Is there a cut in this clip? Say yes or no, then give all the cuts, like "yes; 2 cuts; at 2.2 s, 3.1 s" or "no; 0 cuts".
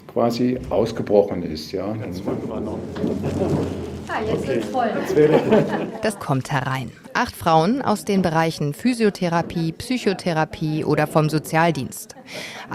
yes; 1 cut; at 6.2 s